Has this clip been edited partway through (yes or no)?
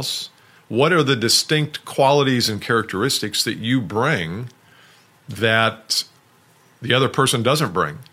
no